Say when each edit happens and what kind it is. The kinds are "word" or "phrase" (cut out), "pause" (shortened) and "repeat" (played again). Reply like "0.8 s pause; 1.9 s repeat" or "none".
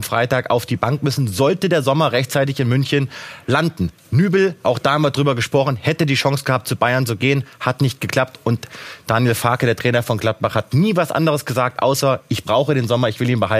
none